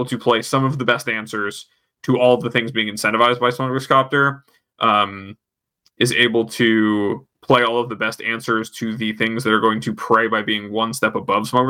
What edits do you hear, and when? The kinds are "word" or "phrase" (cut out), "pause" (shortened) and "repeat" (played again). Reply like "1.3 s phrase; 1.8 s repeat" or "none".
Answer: 7.3 s pause